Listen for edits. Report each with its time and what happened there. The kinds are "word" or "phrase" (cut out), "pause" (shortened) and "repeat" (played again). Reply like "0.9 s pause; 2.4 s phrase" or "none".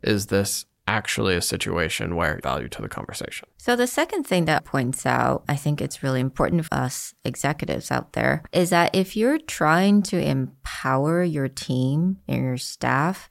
2.4 s phrase; 3.5 s pause; 4.6 s word; 6.7 s word